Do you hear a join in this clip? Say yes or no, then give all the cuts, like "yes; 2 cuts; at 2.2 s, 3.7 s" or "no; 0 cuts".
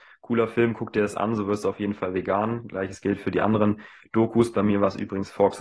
no; 0 cuts